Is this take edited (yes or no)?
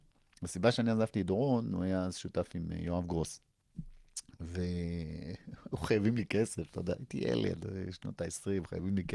no